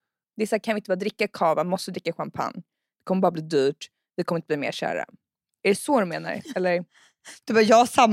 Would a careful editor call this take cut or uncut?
uncut